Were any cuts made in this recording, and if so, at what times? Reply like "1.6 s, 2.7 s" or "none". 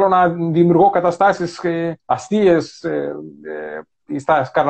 2.0 s